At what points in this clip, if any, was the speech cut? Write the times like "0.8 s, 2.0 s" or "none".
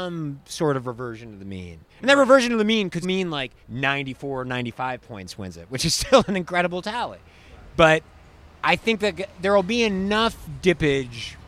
1.9 s, 3.0 s, 3.6 s